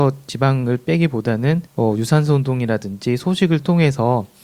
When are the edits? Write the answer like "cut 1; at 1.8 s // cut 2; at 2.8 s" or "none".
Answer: cut 1; at 1.7 s

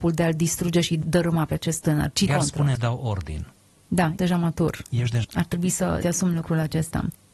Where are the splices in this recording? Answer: cut 1; at 1.0 s // cut 2; at 2.3 s // cut 3; at 2.7 s // cut 4; at 4.2 s // cut 5; at 5.2 s // cut 6; at 6.0 s

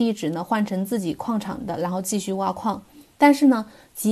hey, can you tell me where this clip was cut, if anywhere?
none

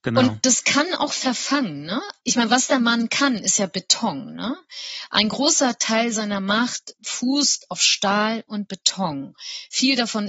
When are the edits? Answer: none

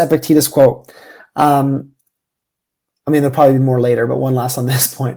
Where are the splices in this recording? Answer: none

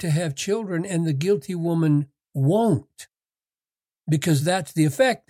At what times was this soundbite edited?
none

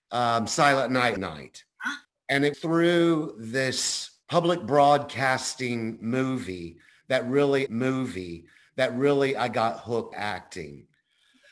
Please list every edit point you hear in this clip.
cut 1; at 1.2 s // cut 2; at 2.0 s // cut 3; at 2.5 s // cut 4; at 4.2 s // cut 5; at 7.7 s // cut 6; at 10.1 s

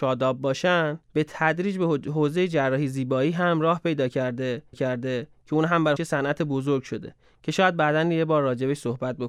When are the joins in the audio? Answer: cut 1; at 1.1 s // cut 2; at 4.7 s // cut 3; at 6.0 s

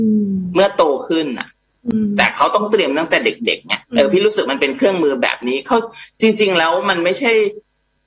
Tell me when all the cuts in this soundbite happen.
cut 1; at 3.9 s

